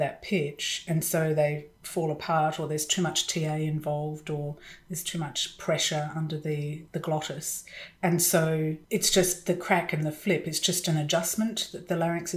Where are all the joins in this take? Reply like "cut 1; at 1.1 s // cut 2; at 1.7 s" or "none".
cut 1; at 6.9 s // cut 2; at 8.8 s